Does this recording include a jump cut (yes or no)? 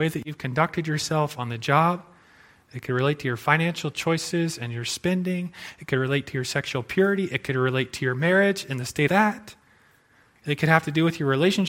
yes